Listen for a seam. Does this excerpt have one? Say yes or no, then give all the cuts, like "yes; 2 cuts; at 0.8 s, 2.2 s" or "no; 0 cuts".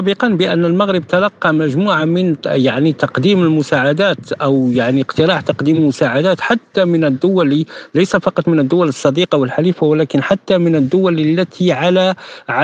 no; 0 cuts